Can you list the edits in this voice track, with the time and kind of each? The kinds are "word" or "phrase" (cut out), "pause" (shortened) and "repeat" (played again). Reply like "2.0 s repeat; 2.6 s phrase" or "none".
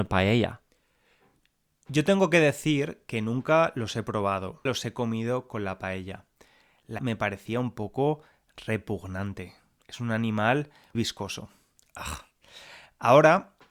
4.7 s word; 7.0 s word; 10.9 s word